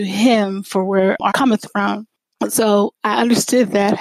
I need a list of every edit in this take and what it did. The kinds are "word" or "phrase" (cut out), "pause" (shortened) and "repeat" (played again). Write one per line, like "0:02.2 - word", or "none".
0:01.3 - word